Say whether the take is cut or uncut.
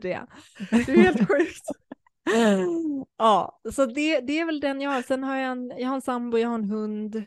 uncut